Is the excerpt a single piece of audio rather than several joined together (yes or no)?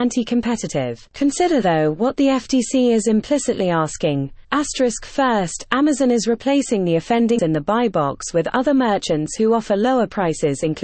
no